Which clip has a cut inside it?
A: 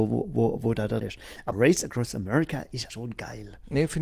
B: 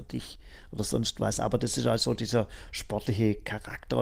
A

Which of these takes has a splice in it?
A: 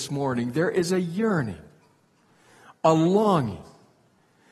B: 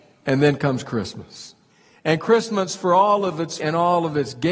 B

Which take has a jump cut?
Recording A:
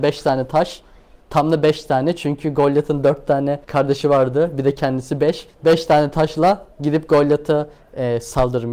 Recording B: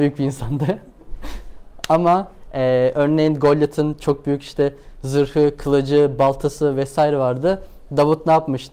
A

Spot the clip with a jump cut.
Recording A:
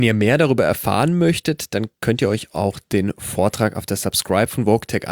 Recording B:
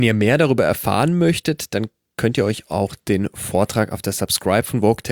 A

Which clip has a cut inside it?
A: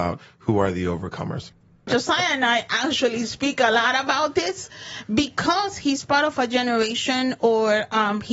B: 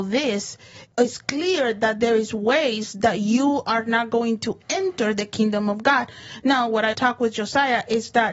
B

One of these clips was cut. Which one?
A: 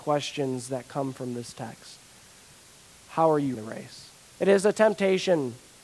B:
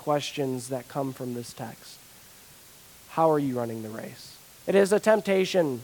A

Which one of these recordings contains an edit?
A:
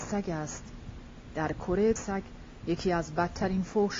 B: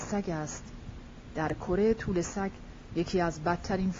A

